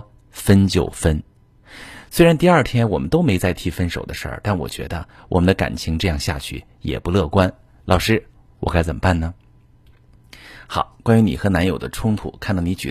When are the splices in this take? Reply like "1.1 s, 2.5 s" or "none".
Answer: 11.0 s